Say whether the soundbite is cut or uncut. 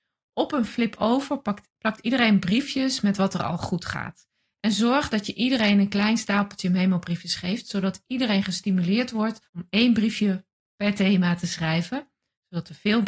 cut